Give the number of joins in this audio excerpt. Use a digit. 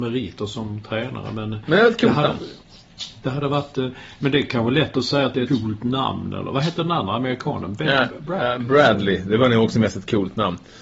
1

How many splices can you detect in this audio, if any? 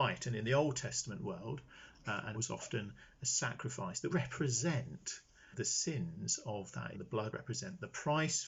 5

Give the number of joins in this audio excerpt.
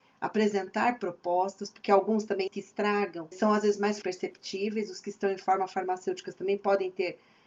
3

